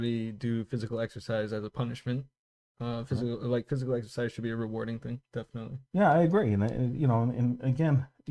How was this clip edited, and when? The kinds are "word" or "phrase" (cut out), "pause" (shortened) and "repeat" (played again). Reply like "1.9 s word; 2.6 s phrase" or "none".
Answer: none